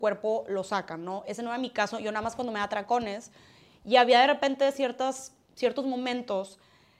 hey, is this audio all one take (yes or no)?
yes